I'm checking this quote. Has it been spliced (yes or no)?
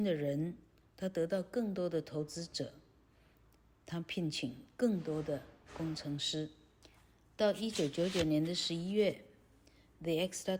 yes